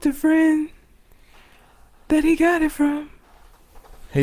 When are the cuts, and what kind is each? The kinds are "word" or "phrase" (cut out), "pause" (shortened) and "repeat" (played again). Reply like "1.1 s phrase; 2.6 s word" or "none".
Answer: none